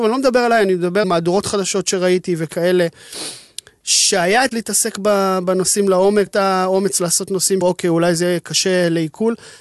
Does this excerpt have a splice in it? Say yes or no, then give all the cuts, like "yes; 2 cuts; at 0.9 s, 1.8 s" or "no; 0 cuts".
yes; 4 cuts; at 1.0 s, 4.5 s, 6.3 s, 7.6 s